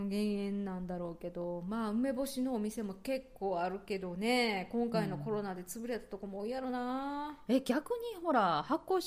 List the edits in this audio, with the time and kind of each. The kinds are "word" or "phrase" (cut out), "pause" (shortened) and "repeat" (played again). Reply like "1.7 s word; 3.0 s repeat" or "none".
none